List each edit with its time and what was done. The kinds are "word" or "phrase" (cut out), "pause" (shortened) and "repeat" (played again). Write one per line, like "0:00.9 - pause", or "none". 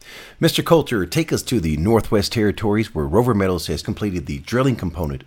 0:03.8 - word

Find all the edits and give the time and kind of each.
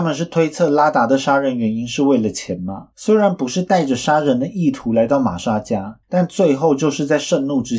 0:02.9 - pause
0:06.0 - pause

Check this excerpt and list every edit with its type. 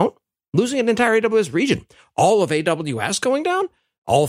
none

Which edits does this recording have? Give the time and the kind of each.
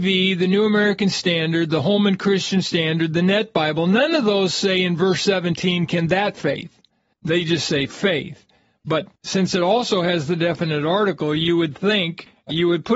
none

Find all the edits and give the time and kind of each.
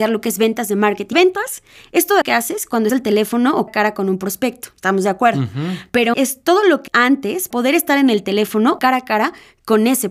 0:01.1 - word
0:02.2 - word
0:02.9 - word
0:03.7 - word
0:06.1 - word
0:06.9 - word
0:07.5 - word
0:08.8 - word

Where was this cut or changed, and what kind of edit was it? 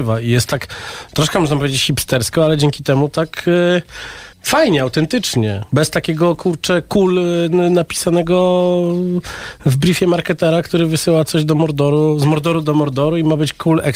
0:04.3 - pause
0:05.7 - pause

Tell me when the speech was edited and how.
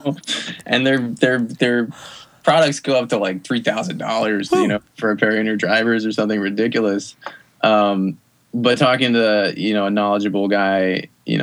none

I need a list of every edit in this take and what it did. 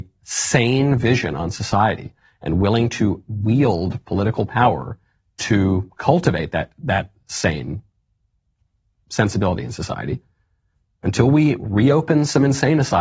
none

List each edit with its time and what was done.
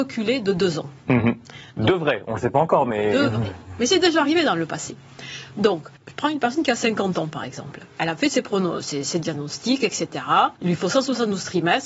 0:01.7 - pause
0:06.0 - pause
0:10.6 - pause

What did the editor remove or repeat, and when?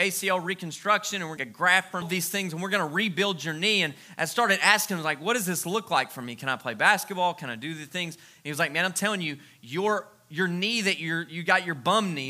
0:01.4 - phrase
0:02.0 - phrase

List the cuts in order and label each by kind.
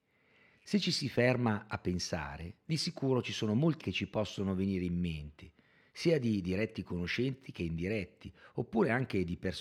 0:03.8 - word

